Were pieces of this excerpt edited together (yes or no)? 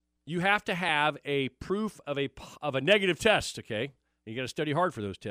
no